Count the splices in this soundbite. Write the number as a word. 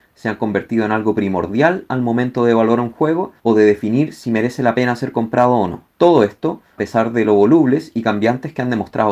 three